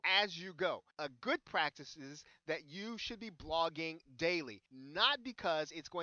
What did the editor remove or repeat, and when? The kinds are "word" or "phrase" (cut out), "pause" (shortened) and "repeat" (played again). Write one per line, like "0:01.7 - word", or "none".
0:00.9 - pause
0:04.7 - pause